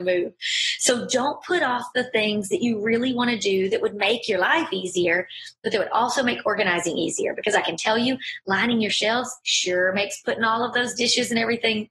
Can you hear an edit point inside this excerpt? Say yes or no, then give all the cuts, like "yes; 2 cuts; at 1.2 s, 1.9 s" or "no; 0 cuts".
no; 0 cuts